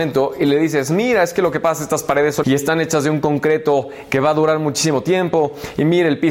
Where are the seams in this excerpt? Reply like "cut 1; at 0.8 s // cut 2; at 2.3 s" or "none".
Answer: cut 1; at 2.4 s